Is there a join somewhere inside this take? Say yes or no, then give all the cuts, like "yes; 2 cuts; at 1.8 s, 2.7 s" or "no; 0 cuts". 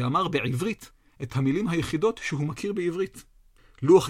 no; 0 cuts